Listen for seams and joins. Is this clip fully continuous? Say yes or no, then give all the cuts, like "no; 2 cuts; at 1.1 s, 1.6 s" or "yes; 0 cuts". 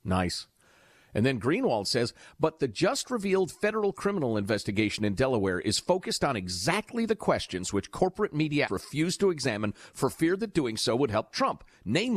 no; 1 cut; at 8.7 s